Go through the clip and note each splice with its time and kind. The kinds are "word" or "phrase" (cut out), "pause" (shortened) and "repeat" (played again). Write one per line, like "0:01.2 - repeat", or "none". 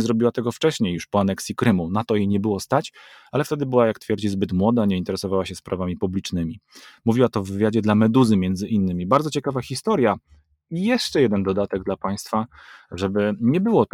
none